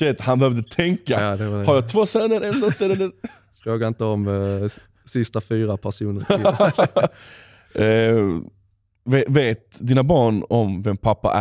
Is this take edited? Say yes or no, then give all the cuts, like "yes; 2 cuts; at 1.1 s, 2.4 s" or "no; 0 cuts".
no; 0 cuts